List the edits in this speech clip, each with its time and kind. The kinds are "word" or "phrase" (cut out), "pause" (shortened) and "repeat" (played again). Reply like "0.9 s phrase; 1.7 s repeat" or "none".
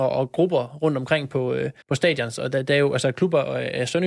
1.8 s pause